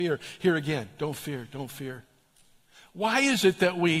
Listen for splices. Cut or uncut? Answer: uncut